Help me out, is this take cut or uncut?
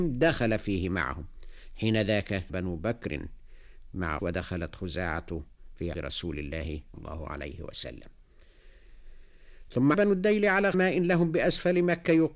cut